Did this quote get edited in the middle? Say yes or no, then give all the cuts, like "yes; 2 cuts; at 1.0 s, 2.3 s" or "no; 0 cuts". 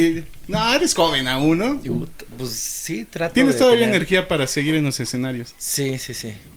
no; 0 cuts